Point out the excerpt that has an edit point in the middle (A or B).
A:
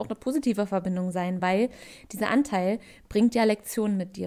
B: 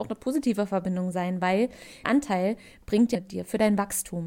B